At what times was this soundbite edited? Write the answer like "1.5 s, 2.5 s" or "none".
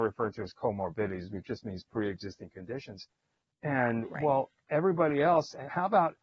none